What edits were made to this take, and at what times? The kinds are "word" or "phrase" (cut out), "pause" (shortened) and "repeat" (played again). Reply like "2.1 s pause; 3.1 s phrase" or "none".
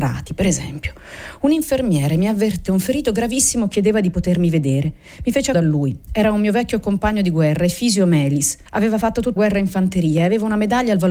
2.7 s word; 5.5 s phrase; 8.7 s pause; 9.4 s word